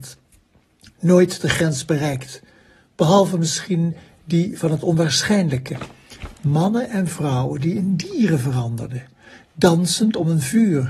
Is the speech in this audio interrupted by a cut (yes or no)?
no